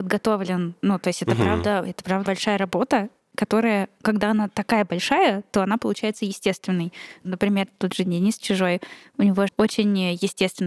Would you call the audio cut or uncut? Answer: cut